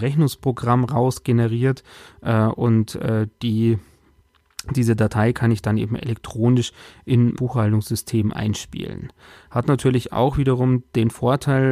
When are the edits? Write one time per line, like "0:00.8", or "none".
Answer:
0:07.4